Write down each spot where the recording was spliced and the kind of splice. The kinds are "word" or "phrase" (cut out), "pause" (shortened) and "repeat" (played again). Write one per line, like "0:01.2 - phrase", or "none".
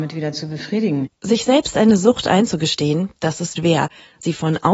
0:03.6 - word